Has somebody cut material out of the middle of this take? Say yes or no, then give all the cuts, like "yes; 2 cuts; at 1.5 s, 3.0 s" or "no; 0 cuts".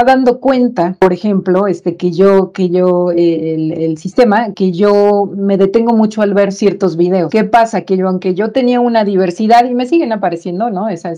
yes; 1 cut; at 4.5 s